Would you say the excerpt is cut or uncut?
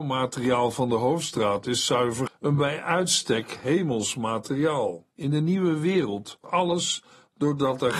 cut